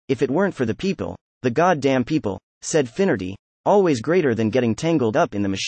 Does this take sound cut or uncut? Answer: uncut